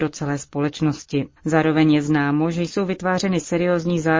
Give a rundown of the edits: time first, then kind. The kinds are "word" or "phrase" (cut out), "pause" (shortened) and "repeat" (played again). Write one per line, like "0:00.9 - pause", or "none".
0:01.4 - pause